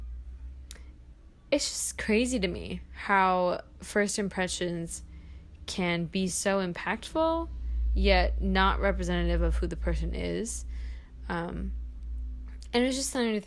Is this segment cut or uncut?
uncut